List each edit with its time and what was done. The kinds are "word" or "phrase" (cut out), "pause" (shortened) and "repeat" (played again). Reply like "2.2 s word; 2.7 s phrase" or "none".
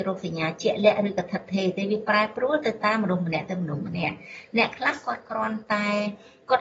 none